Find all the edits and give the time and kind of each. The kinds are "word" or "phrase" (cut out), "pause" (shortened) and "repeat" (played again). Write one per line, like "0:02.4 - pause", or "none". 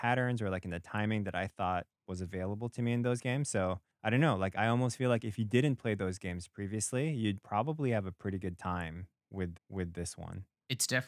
0:09.6 - repeat